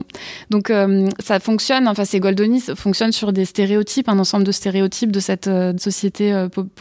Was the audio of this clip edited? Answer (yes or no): yes